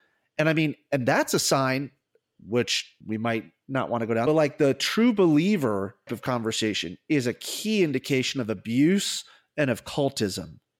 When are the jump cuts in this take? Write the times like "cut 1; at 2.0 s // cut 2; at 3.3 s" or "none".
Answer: cut 1; at 3.0 s // cut 2; at 4.3 s // cut 3; at 6.1 s